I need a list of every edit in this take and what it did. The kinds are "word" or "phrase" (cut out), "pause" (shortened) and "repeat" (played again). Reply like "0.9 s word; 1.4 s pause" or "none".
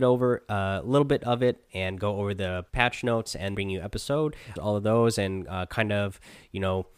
2.7 s pause; 3.5 s word; 4.6 s phrase